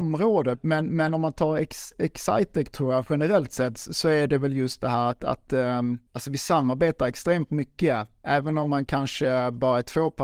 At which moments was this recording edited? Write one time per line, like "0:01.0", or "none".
0:06.1

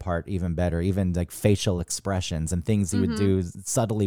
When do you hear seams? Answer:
none

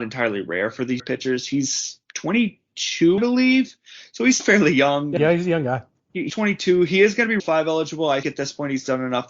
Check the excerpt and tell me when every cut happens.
0:01.0
0:03.2
0:04.4
0:05.2
0:06.3
0:07.4
0:08.2

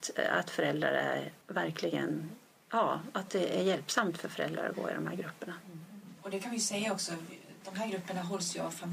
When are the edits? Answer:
0:01.4
0:06.2
0:07.6

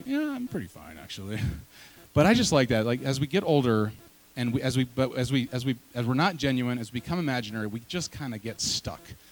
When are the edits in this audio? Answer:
none

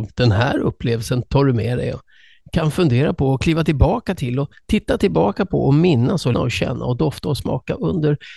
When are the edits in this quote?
0:06.3

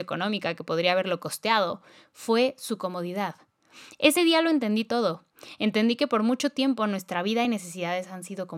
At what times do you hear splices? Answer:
none

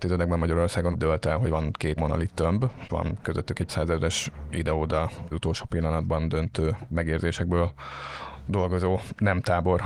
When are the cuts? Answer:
0:00.9
0:02.0
0:02.9
0:03.7
0:05.3

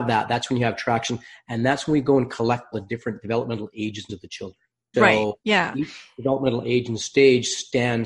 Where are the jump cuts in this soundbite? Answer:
0:02.7
0:04.1
0:04.9

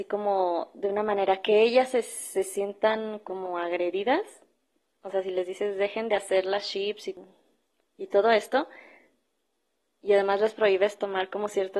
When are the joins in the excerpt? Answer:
none

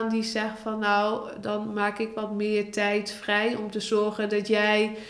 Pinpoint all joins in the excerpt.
none

